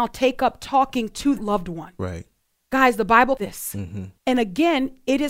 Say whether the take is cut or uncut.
cut